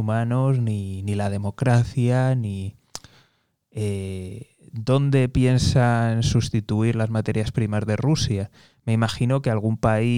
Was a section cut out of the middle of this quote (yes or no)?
no